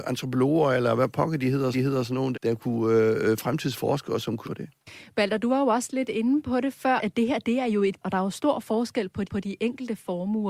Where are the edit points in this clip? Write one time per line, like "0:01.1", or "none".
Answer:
0:01.7
0:02.3
0:04.4
0:07.0
0:08.0
0:09.3